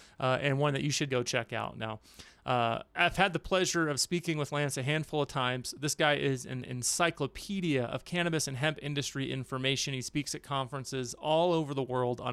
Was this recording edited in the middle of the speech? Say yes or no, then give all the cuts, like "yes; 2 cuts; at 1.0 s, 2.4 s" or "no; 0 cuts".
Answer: yes; 2 cuts; at 1.1 s, 2.9 s